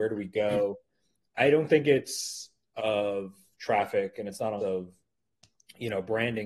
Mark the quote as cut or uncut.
cut